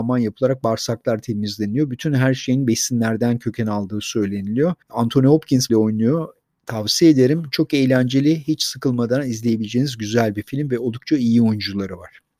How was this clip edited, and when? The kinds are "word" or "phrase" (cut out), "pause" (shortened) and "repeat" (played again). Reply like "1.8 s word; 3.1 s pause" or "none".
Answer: 4.8 s pause; 5.7 s word